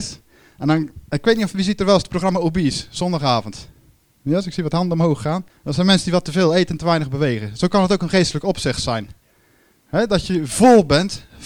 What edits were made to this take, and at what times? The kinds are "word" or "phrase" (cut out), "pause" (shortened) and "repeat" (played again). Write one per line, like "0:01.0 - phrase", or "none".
0:05.5 - pause